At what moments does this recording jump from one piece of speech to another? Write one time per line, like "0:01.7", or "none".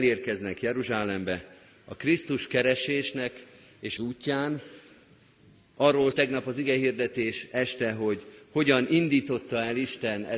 0:04.0
0:06.1